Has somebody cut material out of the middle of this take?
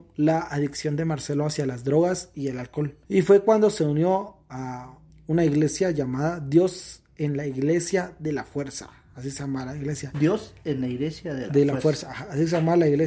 yes; 2 cuts; at 3.0 s, 5.1 s

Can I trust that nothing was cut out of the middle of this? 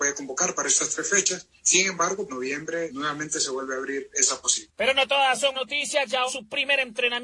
no; 5 cuts; at 1.6 s, 2.3 s, 2.9 s, 5.5 s, 6.3 s

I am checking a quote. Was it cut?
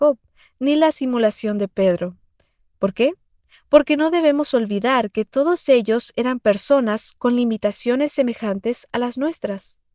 no; 0 cuts

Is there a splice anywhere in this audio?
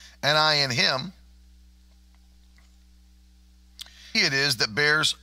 yes; 1 cut; at 4.1 s

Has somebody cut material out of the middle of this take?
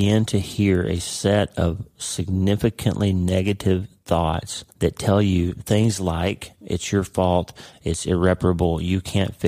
yes; 1 cut; at 4.7 s

